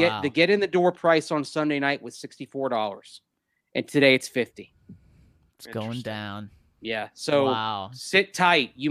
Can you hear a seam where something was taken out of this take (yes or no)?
no